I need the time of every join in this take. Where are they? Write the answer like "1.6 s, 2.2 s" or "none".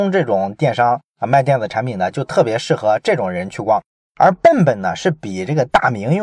none